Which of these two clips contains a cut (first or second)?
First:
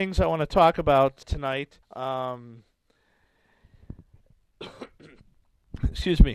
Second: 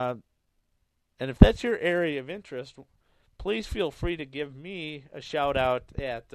first